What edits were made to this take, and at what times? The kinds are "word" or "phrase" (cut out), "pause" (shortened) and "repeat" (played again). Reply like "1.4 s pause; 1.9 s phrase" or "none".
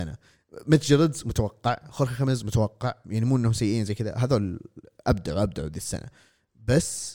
none